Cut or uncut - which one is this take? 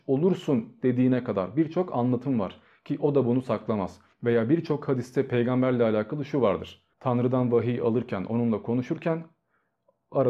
cut